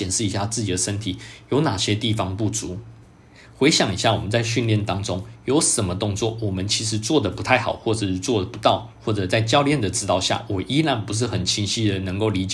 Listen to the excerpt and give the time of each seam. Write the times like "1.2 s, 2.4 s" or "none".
none